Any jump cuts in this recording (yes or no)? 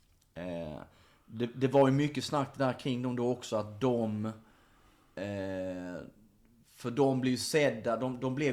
no